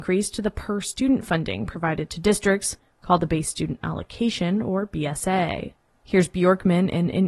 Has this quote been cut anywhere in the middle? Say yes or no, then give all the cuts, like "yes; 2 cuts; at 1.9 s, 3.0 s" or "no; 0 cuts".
no; 0 cuts